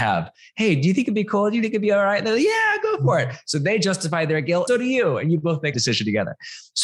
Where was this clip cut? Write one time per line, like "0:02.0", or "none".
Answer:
0:04.7
0:05.7